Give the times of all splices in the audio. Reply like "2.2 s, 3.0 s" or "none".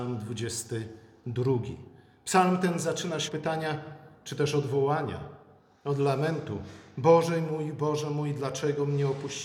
3.3 s